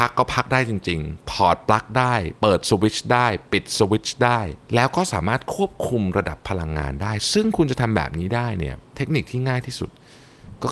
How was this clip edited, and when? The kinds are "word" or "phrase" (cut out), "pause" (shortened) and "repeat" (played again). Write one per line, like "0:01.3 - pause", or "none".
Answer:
0:04.6 - pause